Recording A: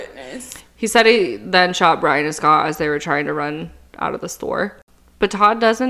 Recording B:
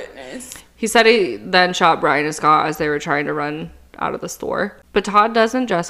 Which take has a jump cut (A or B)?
B